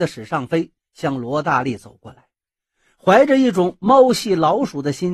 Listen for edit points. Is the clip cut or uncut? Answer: uncut